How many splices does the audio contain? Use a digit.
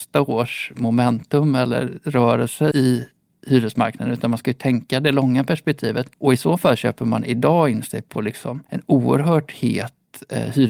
3